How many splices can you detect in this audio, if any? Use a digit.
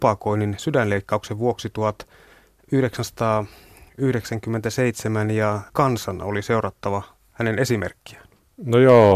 1